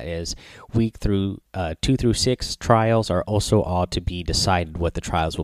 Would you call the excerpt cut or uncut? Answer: uncut